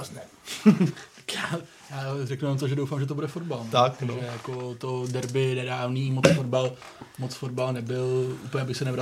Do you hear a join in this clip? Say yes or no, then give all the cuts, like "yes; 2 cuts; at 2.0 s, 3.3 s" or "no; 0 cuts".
no; 0 cuts